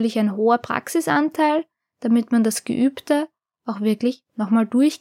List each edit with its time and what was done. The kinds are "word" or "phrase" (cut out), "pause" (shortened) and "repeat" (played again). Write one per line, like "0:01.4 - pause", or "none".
none